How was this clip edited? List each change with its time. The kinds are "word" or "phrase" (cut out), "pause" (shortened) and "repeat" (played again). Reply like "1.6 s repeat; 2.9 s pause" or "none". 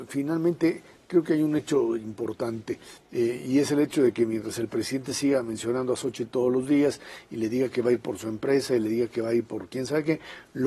none